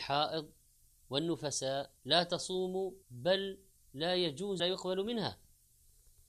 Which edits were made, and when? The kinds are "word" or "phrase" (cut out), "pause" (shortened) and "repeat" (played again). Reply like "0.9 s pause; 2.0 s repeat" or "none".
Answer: 2.0 s pause; 3.0 s pause; 4.6 s word